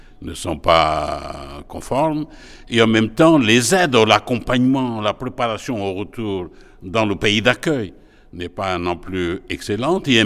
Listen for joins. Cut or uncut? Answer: uncut